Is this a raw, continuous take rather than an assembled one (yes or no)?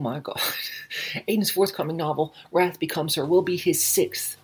yes